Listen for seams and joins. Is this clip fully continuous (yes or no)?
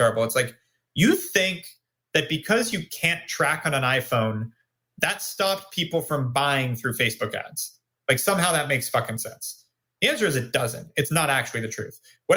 yes